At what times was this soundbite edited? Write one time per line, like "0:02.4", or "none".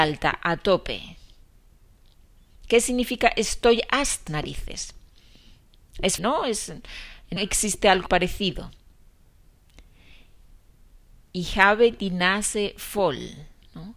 0:04.3
0:06.2
0:07.4
0:08.1